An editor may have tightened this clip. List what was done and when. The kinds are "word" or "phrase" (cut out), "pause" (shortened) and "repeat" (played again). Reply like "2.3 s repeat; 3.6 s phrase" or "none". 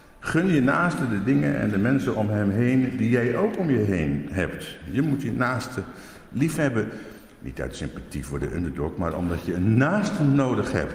none